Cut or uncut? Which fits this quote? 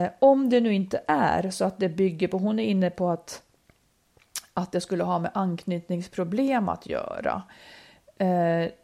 uncut